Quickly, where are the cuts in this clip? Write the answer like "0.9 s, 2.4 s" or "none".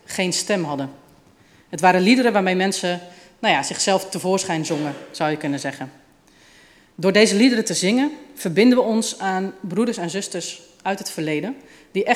none